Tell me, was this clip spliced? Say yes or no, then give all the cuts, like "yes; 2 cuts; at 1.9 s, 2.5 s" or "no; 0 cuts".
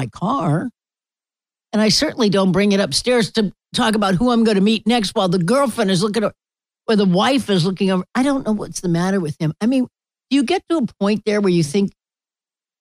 no; 0 cuts